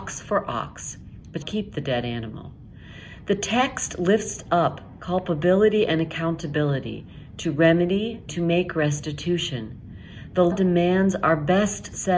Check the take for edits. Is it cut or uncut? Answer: cut